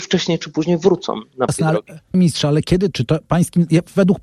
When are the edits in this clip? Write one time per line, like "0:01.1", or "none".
0:01.5
0:02.1
0:02.9